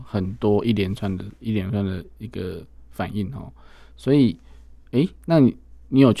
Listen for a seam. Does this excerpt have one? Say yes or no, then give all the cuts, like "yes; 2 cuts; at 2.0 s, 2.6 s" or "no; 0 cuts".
no; 0 cuts